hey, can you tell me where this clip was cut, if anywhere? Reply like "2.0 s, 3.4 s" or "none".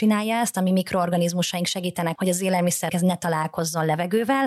2.2 s, 2.9 s